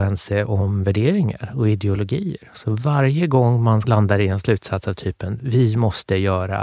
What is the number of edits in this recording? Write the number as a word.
zero